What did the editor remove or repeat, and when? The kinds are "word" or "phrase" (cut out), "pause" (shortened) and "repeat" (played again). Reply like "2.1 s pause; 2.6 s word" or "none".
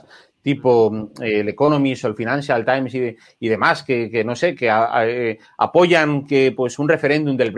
none

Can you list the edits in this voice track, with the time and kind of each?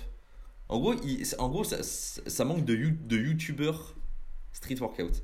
none

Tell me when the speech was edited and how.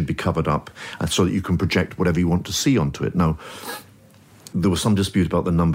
4.5 s word

